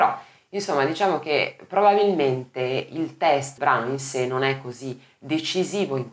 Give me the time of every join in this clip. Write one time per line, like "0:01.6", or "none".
0:03.6